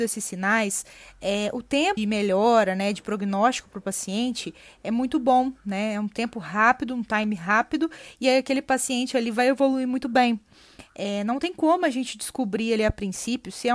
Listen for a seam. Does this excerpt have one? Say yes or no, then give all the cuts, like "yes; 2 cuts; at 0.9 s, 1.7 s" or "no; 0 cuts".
yes; 1 cut; at 2.0 s